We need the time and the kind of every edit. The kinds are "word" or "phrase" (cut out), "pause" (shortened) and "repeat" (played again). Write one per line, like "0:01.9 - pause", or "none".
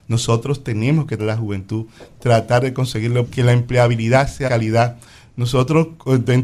0:01.2 - word
0:03.2 - word
0:04.5 - word